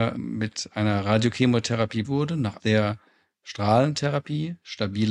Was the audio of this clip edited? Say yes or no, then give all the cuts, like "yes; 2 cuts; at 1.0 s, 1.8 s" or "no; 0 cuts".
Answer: yes; 2 cuts; at 2.0 s, 2.6 s